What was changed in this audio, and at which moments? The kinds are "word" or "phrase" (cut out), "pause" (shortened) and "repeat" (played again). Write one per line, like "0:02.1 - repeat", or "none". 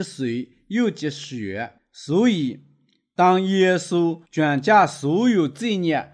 0:01.8 - pause
0:04.3 - pause